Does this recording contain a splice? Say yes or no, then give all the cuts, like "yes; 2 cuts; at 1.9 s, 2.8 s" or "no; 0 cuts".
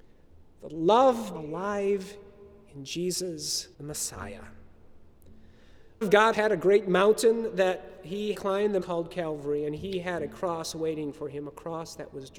yes; 6 cuts; at 1.3 s, 3.7 s, 6.0 s, 6.3 s, 8.3 s, 8.8 s